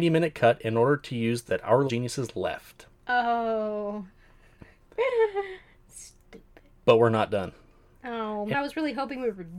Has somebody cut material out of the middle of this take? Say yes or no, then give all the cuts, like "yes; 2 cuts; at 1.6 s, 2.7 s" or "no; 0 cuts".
yes; 3 cuts; at 1.5 s, 1.9 s, 8.5 s